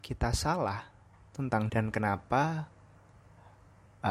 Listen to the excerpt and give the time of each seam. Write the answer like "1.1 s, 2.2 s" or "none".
1.7 s